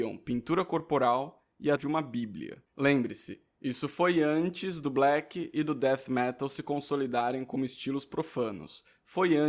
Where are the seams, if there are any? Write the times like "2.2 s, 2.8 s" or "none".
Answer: 1.8 s, 2.7 s